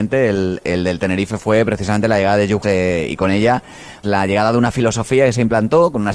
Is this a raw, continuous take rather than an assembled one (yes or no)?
no